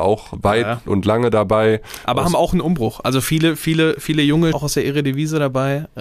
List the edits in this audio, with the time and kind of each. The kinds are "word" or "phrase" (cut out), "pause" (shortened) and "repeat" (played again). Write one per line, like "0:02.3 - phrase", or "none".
0:04.5 - phrase